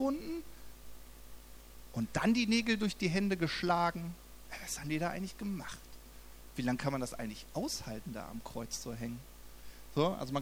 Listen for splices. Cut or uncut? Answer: uncut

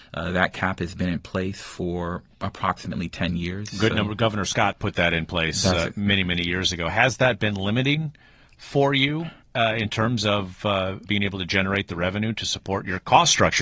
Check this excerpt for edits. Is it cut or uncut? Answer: cut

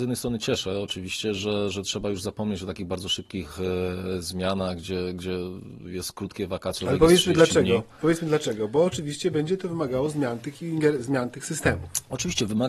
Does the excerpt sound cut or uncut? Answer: uncut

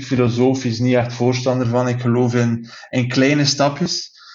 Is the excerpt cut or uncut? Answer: uncut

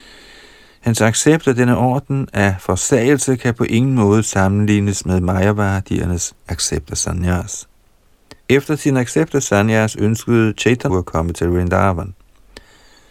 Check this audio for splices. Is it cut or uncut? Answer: cut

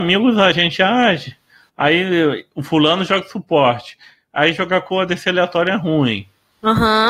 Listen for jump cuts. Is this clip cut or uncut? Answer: uncut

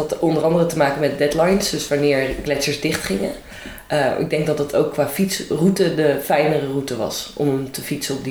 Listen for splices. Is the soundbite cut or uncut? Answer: uncut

